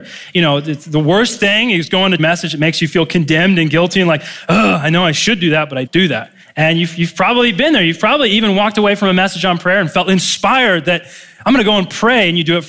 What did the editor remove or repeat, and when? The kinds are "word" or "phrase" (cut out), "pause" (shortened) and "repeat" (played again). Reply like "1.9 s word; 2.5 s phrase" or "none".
2.2 s phrase; 5.9 s word; 6.4 s pause